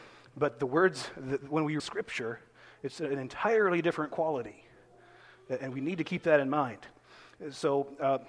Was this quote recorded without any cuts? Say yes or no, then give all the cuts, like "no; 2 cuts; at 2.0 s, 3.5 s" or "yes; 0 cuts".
no; 1 cut; at 1.8 s